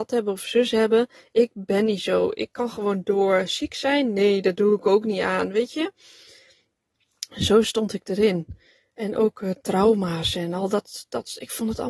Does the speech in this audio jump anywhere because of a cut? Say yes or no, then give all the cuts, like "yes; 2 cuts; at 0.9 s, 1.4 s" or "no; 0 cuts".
no; 0 cuts